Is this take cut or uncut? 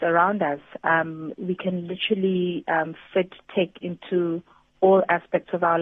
uncut